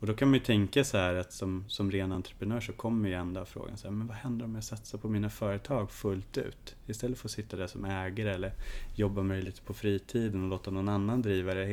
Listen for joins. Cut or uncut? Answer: uncut